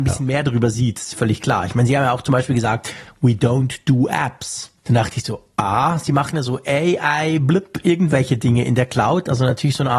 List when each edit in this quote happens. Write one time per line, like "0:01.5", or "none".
0:04.8